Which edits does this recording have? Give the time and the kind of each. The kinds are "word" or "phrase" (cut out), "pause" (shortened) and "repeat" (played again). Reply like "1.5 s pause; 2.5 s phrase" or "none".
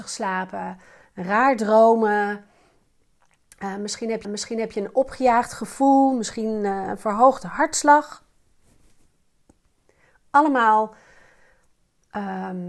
4.2 s repeat